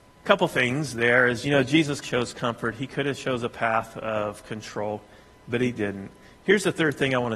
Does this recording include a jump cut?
yes; 2 cuts; at 1.4 s, 2.0 s

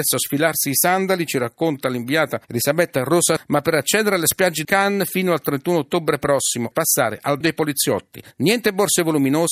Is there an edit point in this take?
yes; 6 cuts; at 2.4 s, 3.4 s, 4.6 s, 6.7 s, 7.4 s, 8.3 s

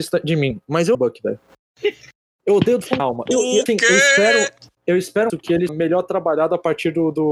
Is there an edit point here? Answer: yes; 6 cuts; at 0.9 s, 3.0 s, 3.3 s, 3.7 s, 5.3 s, 5.7 s

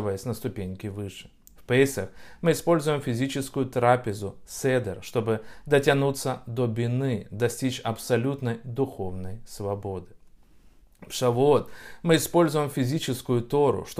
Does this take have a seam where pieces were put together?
no; 0 cuts

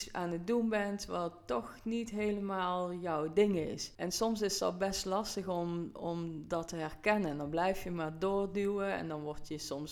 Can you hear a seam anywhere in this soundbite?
no; 0 cuts

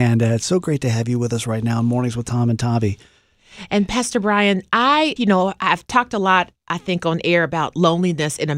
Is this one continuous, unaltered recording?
no; 1 cut; at 5.2 s

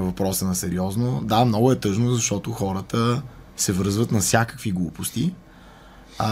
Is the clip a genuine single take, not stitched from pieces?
no; 1 cut; at 3.5 s

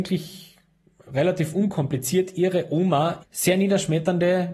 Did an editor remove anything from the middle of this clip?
yes; 1 cut; at 3.2 s

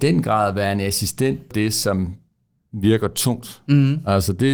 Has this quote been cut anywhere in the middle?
yes; 1 cut; at 1.5 s

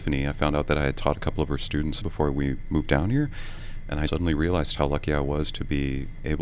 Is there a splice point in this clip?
yes; 2 cuts; at 2.0 s, 4.1 s

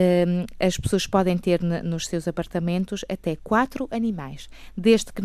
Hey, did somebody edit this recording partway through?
no; 0 cuts

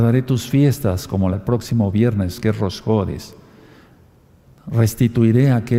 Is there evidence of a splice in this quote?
yes; 1 cut; at 1.3 s

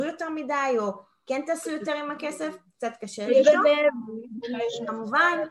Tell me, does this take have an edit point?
no; 0 cuts

